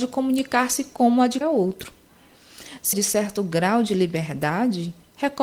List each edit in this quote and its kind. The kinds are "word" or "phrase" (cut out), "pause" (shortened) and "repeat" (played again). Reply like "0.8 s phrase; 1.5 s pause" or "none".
1.4 s word; 2.9 s word